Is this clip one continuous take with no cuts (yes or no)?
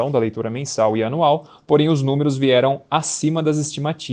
yes